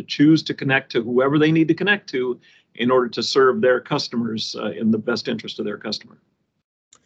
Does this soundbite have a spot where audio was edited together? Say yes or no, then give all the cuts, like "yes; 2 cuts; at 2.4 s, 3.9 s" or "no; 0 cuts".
no; 0 cuts